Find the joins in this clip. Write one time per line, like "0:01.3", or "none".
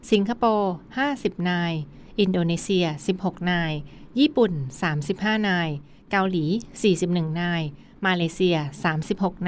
none